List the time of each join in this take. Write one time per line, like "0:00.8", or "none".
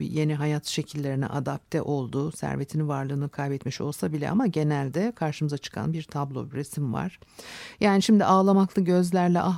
none